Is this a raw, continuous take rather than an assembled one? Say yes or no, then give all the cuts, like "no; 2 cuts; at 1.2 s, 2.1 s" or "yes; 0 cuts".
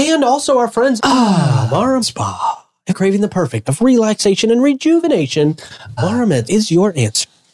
no; 6 cuts; at 1.0 s, 2.0 s, 2.9 s, 3.6 s, 6.0 s, 6.4 s